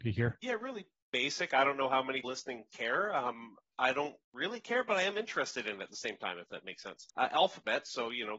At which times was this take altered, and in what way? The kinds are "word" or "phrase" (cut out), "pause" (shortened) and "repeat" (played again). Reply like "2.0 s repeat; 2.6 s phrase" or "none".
2.2 s word; 4.2 s pause; 7.1 s pause